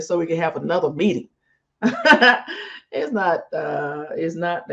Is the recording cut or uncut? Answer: uncut